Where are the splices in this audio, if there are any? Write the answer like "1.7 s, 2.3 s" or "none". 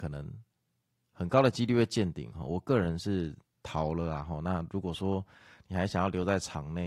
none